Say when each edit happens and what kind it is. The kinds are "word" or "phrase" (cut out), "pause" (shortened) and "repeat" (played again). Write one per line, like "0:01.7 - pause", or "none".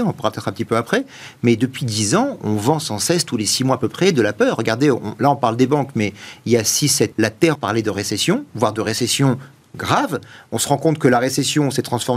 0:07.1 - word
0:07.5 - word